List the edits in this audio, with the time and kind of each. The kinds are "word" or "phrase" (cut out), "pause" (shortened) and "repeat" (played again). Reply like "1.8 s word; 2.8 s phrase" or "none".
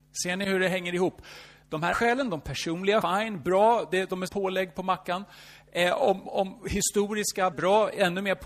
1.9 s word; 3.0 s word; 3.4 s word; 4.3 s word; 6.2 s word; 7.5 s word